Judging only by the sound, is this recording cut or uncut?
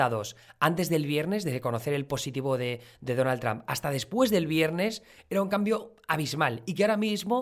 uncut